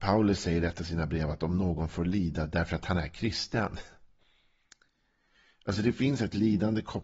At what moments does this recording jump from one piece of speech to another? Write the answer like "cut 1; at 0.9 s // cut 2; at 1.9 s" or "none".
none